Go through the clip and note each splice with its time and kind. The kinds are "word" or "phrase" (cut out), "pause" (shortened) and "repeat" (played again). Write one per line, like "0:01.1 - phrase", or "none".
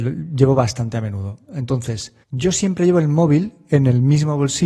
0:02.2 - pause